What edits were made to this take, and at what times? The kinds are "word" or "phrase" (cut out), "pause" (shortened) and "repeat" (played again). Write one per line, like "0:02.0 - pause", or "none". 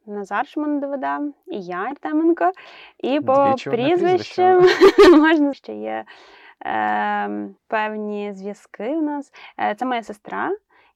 0:01.9 - word
0:05.5 - phrase
0:07.6 - pause